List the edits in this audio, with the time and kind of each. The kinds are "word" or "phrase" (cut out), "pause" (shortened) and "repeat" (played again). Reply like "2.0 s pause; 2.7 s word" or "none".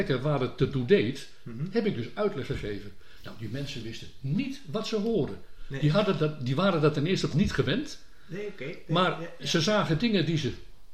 7.3 s word